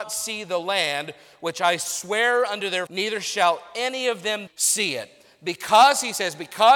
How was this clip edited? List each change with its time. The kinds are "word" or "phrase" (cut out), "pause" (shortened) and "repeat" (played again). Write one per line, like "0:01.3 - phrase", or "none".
0:02.9 - word
0:04.5 - phrase